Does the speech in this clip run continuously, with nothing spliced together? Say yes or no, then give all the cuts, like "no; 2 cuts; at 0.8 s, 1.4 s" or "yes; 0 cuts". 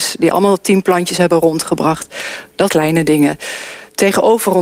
no; 1 cut; at 2.7 s